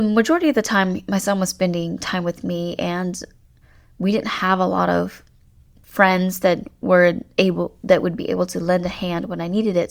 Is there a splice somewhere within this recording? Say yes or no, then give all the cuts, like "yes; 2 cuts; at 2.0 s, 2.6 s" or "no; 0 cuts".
no; 0 cuts